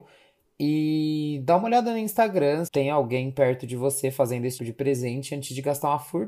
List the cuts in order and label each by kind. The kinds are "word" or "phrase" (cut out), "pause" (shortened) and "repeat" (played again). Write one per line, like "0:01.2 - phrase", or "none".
0:02.7 - word
0:04.6 - word